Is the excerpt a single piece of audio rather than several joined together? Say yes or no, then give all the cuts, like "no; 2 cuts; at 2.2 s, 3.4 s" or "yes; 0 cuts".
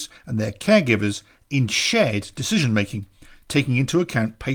yes; 0 cuts